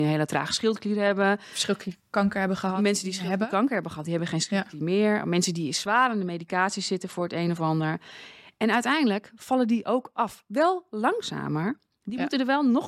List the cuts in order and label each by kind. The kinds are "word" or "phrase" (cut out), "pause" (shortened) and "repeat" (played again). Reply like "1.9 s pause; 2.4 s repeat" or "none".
none

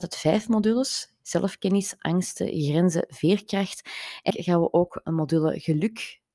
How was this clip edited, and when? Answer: 4.3 s word

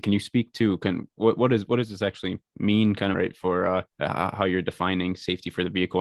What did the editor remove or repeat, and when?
3.1 s phrase; 3.9 s pause

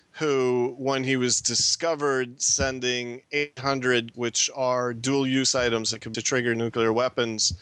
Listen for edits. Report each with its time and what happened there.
4.1 s word; 6.1 s word

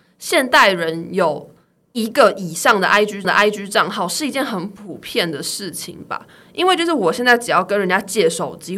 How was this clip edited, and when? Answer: 3.2 s repeat

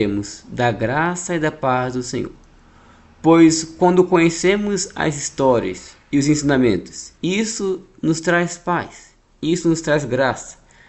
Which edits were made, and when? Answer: 7.1 s pause

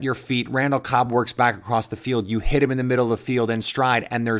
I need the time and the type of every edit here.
none

